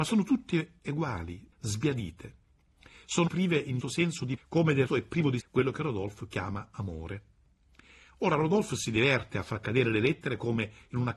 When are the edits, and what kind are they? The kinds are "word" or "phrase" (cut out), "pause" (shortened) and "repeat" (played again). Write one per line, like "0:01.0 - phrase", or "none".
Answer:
0:01.5 - word
0:03.3 - word
0:03.8 - word
0:04.4 - word
0:04.9 - word
0:05.4 - word